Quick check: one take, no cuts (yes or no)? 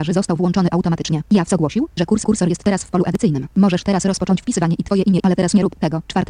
no